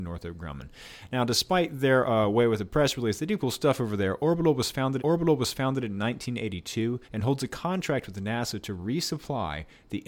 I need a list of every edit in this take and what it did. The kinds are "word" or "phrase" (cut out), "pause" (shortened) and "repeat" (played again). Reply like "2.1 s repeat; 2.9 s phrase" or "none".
3.4 s word; 5.0 s repeat; 7.0 s pause

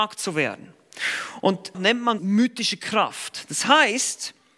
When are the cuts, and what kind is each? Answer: 1.7 s word; 2.2 s word

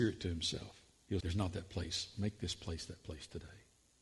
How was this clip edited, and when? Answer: 1.2 s word

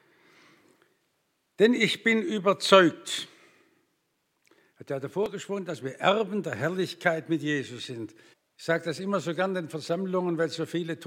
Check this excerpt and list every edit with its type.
8.3 s pause

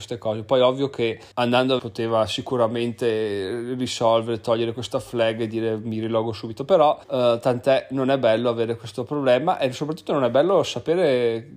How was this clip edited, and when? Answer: 1.3 s pause; 1.8 s phrase; 7.0 s pause

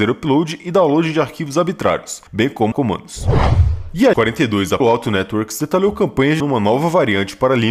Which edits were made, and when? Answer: 2.3 s pause; 2.7 s word; 4.1 s word; 4.8 s word; 6.4 s word

